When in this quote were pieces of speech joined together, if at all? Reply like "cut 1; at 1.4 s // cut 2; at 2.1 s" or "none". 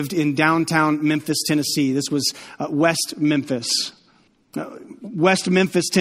cut 1; at 4.3 s